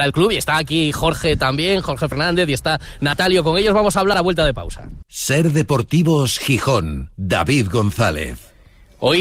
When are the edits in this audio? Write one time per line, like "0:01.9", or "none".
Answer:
0:07.1